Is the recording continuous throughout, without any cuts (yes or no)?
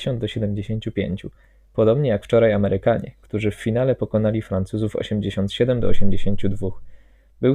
yes